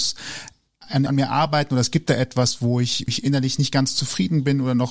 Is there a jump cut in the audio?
yes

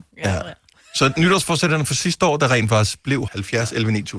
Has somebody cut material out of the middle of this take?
yes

